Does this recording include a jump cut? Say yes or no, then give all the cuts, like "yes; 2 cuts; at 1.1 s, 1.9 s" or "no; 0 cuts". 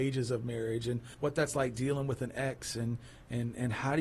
yes; 1 cut; at 1.1 s